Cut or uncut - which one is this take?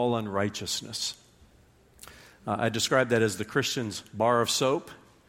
uncut